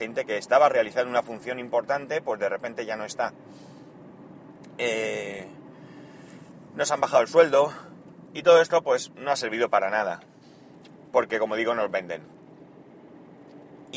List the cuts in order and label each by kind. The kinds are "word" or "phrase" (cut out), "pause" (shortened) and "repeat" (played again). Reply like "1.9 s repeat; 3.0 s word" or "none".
10.4 s pause